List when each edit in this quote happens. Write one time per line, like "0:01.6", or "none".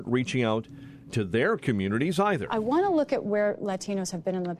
none